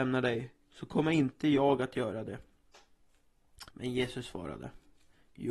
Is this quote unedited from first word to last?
no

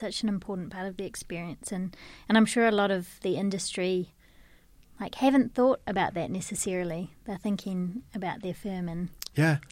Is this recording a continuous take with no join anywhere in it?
yes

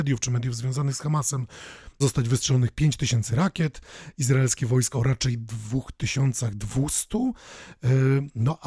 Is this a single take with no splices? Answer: no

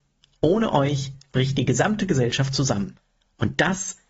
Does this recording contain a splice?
no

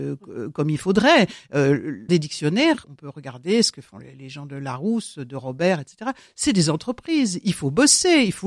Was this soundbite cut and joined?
yes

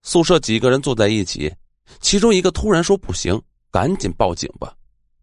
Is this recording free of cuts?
yes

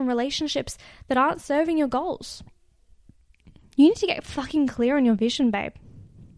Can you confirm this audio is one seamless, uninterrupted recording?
yes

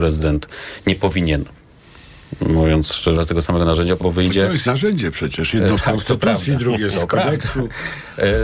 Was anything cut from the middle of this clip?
yes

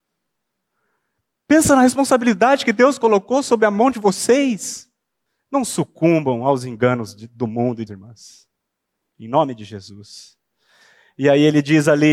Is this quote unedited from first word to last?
no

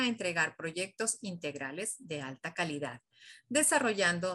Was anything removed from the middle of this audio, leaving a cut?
no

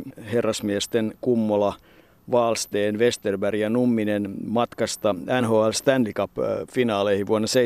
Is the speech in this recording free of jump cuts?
yes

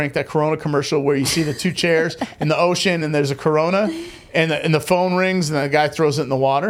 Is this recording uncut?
yes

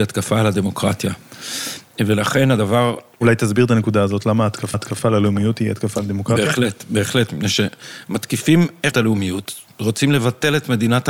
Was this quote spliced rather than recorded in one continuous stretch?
yes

